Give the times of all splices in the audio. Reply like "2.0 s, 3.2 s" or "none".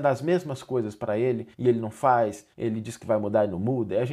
1.5 s, 2.5 s